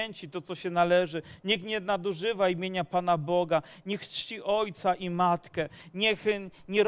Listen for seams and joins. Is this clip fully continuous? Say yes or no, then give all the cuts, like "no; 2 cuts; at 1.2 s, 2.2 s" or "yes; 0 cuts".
yes; 0 cuts